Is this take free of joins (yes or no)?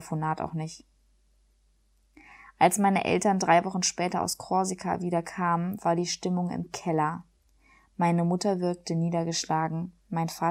yes